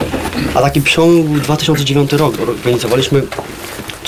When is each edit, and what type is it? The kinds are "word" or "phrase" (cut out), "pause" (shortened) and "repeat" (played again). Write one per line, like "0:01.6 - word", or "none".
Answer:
0:02.4 - word